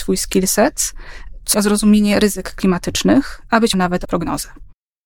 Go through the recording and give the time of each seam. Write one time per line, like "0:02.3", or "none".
0:01.5
0:03.7
0:04.0